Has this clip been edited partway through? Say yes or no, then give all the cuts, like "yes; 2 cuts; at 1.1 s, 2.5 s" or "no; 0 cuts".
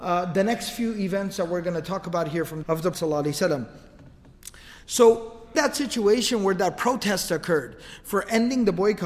yes; 3 cuts; at 2.6 s, 2.9 s, 5.5 s